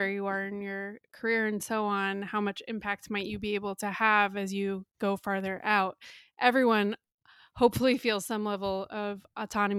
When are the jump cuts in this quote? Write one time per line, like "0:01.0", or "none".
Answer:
none